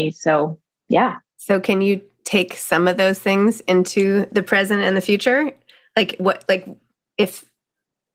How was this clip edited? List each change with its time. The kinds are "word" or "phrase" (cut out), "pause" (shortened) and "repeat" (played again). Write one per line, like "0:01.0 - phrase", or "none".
none